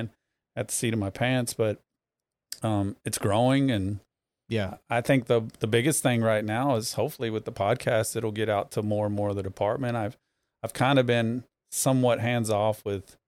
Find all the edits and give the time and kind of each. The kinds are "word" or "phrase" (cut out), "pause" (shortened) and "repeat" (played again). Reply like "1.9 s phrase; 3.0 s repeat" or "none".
none